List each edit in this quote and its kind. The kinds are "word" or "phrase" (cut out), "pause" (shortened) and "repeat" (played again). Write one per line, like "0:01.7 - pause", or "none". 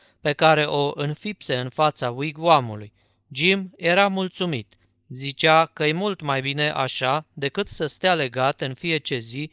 none